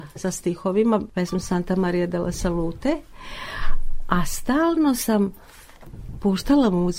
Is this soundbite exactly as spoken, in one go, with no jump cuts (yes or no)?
yes